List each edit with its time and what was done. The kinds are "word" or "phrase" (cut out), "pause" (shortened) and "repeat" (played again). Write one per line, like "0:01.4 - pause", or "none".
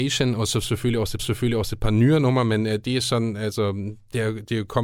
0:01.2 - repeat